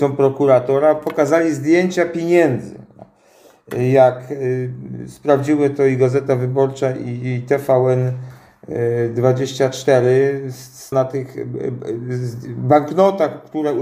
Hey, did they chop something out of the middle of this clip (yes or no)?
yes